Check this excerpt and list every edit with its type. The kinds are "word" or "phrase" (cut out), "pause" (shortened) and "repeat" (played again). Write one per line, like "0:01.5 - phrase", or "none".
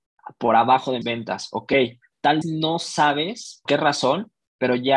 0:01.0 - word
0:02.4 - word
0:03.7 - word